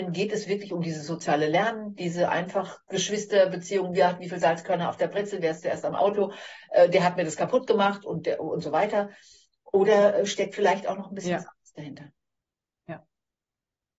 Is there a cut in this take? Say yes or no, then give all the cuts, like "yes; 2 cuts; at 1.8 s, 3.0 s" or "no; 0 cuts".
no; 0 cuts